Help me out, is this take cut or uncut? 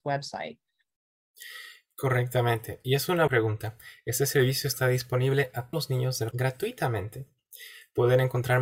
cut